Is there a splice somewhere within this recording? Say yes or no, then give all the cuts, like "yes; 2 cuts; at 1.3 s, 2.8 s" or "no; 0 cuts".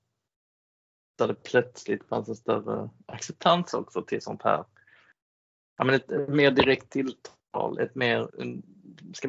yes; 1 cut; at 8.3 s